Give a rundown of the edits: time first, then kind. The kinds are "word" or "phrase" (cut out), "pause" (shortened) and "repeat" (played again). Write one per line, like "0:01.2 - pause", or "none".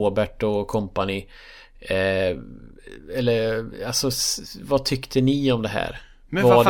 none